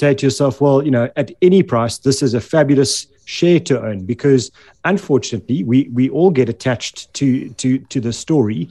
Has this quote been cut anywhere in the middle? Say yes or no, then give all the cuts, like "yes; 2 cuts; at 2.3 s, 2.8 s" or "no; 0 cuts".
no; 0 cuts